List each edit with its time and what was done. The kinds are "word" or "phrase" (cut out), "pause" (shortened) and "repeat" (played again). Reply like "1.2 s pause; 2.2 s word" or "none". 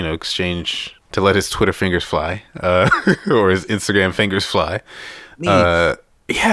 1.0 s pause